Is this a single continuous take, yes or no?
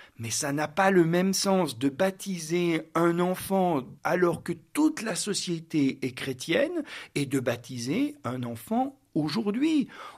no